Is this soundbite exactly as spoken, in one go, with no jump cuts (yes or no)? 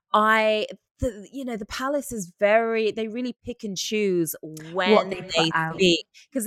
yes